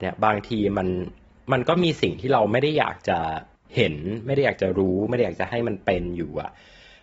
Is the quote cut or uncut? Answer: uncut